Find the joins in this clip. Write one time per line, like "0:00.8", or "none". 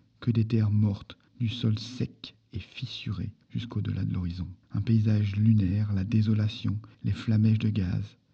0:01.3
0:04.6
0:06.9